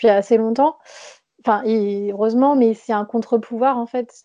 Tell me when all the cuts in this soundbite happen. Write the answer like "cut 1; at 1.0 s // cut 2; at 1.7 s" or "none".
none